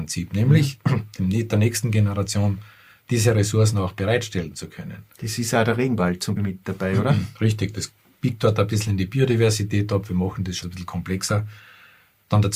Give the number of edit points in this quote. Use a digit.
3